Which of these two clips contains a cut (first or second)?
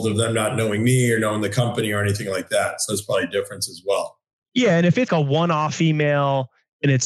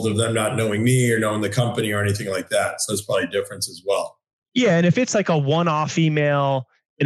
first